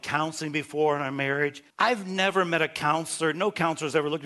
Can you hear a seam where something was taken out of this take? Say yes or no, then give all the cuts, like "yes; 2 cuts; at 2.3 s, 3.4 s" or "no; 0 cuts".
yes; 1 cut; at 1.7 s